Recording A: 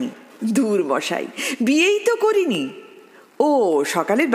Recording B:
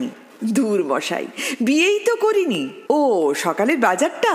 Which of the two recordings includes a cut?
B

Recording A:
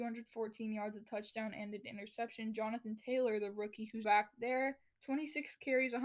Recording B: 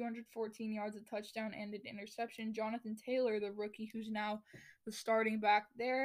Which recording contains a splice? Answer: A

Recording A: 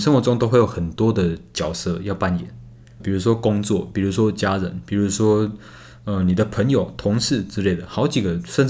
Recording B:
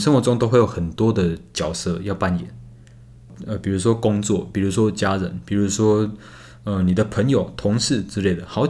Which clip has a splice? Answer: A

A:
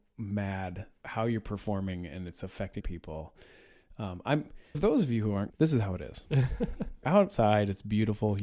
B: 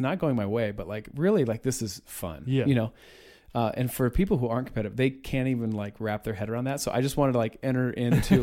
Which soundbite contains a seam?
A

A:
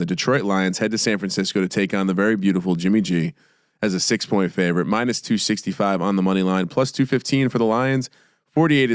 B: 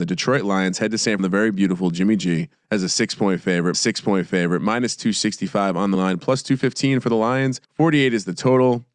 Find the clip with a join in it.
B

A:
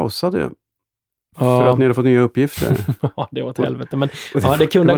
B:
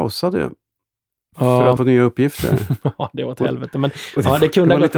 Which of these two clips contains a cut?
B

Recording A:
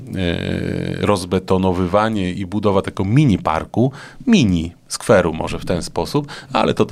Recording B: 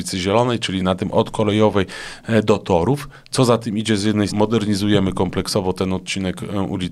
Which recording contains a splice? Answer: B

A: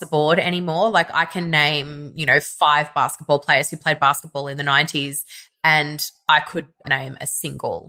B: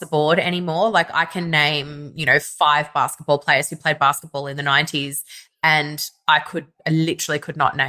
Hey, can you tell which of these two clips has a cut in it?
A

